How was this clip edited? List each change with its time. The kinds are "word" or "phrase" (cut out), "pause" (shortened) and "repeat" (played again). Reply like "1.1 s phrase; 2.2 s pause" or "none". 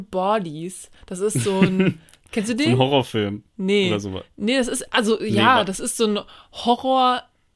none